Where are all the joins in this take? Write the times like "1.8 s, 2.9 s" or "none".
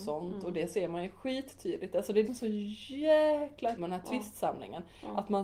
2.2 s, 3.8 s